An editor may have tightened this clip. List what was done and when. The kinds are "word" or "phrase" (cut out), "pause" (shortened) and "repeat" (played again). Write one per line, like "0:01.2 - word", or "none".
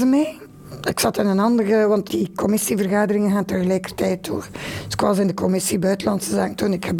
0:02.1 - word